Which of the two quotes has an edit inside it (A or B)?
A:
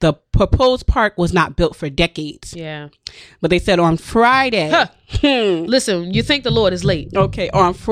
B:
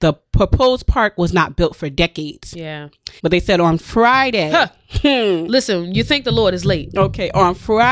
B